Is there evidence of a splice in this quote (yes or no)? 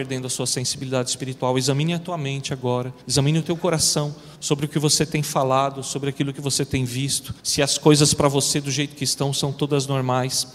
yes